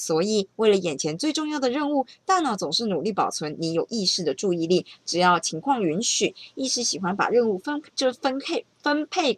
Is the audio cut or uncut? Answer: cut